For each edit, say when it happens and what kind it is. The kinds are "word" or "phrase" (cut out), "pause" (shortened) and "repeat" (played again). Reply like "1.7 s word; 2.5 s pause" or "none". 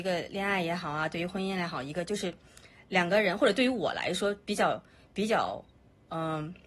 none